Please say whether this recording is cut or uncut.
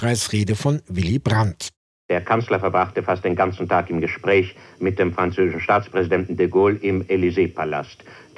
uncut